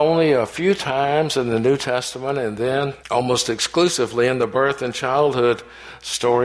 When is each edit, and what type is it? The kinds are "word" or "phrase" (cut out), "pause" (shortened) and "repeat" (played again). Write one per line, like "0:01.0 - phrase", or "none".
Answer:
0:03.0 - pause